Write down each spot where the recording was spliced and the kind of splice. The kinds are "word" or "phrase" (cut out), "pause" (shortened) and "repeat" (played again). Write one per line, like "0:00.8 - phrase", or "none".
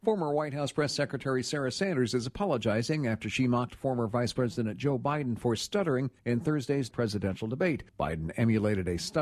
0:06.2 - pause
0:06.9 - word
0:07.9 - pause